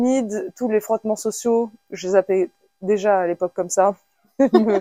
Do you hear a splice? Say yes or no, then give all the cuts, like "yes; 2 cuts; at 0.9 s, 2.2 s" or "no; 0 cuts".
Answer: no; 0 cuts